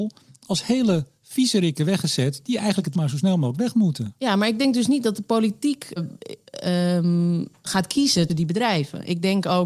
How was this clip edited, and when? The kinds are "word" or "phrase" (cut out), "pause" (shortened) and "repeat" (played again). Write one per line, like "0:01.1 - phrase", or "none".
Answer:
0:02.9 - word
0:06.0 - word
0:08.3 - word